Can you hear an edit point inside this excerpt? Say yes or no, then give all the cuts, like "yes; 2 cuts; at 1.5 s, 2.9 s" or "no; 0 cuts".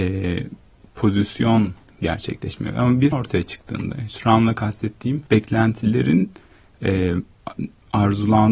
yes; 2 cuts; at 3.1 s, 5.3 s